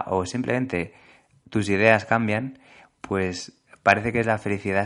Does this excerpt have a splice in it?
no; 0 cuts

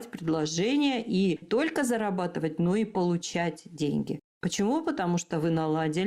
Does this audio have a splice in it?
yes; 2 cuts; at 1.4 s, 4.3 s

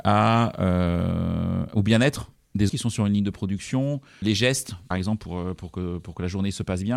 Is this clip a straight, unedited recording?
no; 3 cuts; at 2.7 s, 4.2 s, 4.9 s

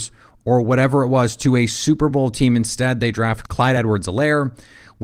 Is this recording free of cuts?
yes; 0 cuts

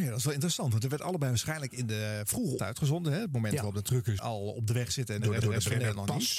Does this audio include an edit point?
yes; 3 cuts; at 2.6 s, 4.2 s, 5.4 s

